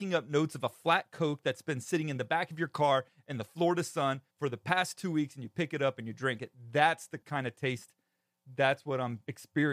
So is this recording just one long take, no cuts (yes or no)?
no